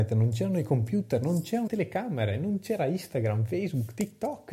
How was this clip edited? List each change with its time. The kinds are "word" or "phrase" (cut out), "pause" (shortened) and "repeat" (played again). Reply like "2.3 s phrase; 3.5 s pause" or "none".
1.7 s word